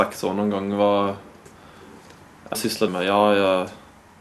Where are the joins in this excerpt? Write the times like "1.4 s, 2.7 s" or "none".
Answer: 2.5 s, 2.9 s